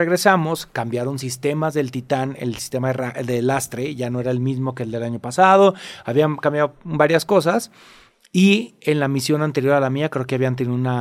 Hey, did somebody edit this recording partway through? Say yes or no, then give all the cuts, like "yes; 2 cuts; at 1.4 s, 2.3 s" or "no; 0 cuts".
no; 0 cuts